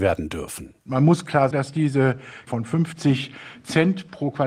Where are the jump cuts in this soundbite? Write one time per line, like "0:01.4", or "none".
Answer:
0:01.5
0:02.5